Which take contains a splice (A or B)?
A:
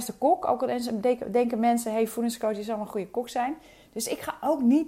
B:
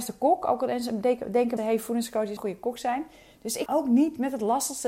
B